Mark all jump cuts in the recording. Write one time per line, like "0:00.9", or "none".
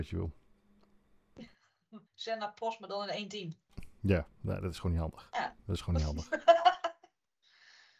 0:02.1
0:05.6

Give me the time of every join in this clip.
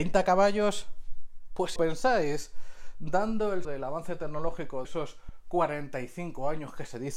0:01.8
0:03.6
0:04.8

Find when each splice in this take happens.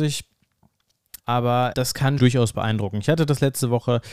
0:01.2
0:01.7
0:02.2

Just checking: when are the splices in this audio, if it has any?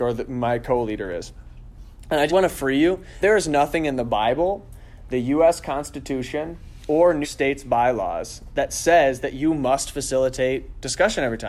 0:02.3
0:03.2
0:07.2

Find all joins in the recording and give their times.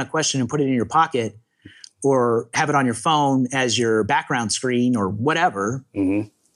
none

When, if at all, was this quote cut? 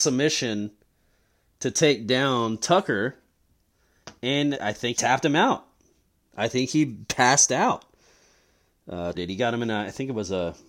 0:04.5
0:04.9
0:09.1

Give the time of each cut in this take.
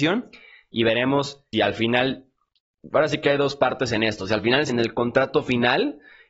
0:01.5
0:04.7

